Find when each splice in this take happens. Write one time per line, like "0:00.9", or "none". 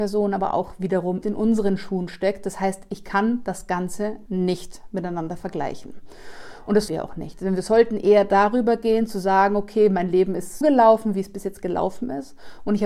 0:01.2
0:04.3
0:06.9
0:10.6